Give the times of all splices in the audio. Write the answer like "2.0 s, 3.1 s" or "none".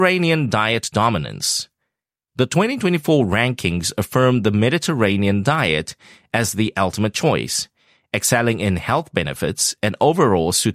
none